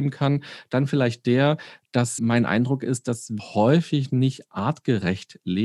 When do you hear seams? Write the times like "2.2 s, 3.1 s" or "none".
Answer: 2.2 s, 3.4 s